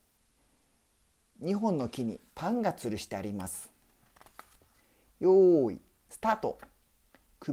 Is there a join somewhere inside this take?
no; 0 cuts

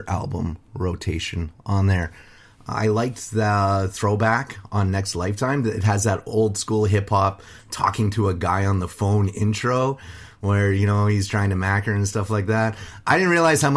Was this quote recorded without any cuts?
yes; 0 cuts

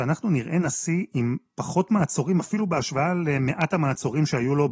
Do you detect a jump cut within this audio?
no; 0 cuts

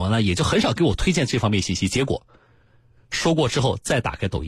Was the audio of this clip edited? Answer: no; 0 cuts

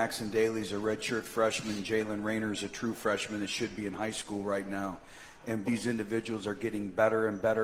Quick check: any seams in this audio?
yes; 1 cut; at 5.6 s

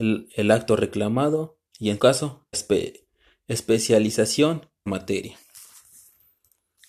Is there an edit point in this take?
yes; 4 cuts; at 1.7 s, 2.0 s, 2.5 s, 4.9 s

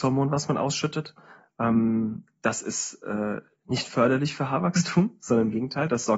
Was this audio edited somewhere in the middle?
no; 0 cuts

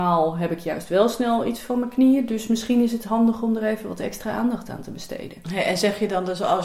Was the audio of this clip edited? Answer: no; 0 cuts

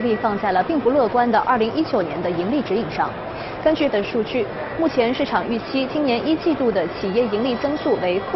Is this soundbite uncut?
no; 1 cut; at 3.9 s

